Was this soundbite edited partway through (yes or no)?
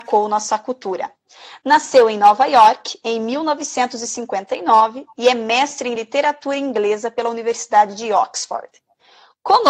no